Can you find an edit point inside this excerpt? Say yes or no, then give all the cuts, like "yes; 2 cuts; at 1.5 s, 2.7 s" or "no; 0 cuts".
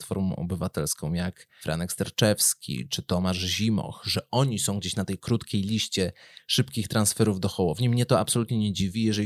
no; 0 cuts